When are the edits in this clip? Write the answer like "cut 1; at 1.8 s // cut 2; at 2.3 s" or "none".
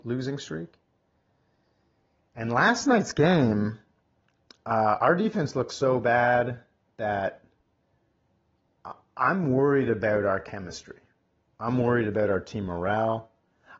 none